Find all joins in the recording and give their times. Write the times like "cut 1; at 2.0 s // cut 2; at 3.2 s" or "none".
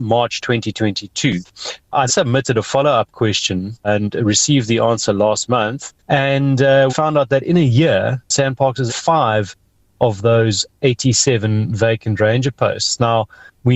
cut 1; at 2.1 s // cut 2; at 6.0 s // cut 3; at 6.9 s // cut 4; at 8.9 s